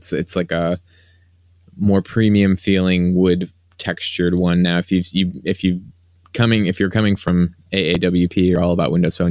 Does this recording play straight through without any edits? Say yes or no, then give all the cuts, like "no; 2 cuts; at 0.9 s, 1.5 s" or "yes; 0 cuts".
yes; 0 cuts